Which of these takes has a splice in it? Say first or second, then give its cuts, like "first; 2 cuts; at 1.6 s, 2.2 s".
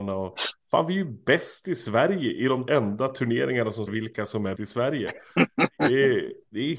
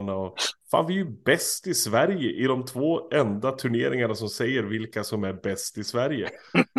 first; 3 cuts; at 2.7 s, 3.9 s, 4.5 s